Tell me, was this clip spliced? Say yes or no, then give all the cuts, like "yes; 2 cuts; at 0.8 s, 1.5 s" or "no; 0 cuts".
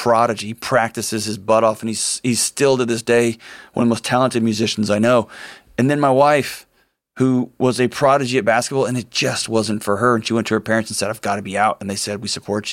no; 0 cuts